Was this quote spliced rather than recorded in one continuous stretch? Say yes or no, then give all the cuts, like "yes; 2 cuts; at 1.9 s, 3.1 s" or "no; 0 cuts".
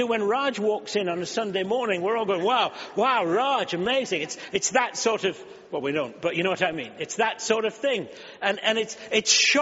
no; 0 cuts